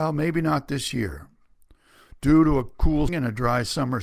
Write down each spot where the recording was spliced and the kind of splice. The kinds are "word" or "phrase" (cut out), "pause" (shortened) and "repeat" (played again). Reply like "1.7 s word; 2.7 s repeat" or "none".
3.1 s word